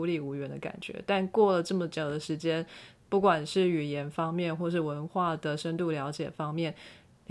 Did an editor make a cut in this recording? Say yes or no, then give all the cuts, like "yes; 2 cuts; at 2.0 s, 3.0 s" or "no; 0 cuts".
no; 0 cuts